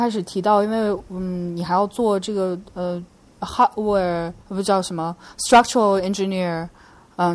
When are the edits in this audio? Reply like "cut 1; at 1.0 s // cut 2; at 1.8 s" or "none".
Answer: cut 1; at 4.4 s